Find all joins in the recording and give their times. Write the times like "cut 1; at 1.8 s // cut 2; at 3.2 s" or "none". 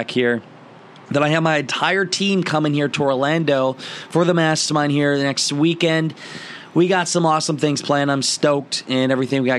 none